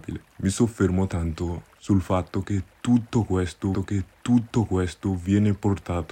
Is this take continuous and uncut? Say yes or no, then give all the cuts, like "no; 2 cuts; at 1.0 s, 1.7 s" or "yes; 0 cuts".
no; 1 cut; at 3.7 s